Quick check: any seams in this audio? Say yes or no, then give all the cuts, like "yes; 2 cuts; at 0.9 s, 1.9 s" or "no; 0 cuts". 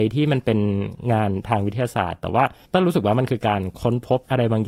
yes; 1 cut; at 2.6 s